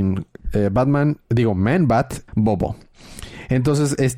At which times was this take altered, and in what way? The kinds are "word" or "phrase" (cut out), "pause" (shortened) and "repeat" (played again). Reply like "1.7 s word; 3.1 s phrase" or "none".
2.3 s word